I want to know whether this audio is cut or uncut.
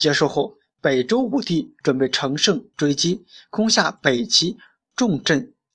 uncut